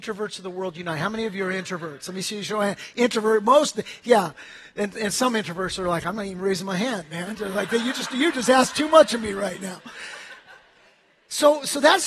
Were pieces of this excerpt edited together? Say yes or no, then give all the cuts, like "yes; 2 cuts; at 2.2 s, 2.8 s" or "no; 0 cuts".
no; 0 cuts